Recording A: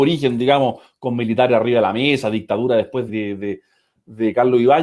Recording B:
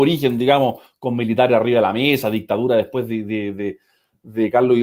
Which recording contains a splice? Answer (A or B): A